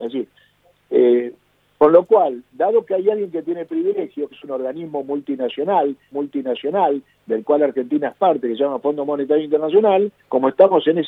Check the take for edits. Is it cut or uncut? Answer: cut